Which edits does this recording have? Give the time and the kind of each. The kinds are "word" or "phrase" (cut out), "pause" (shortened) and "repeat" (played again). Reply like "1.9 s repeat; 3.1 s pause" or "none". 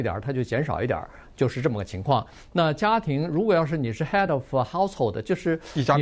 none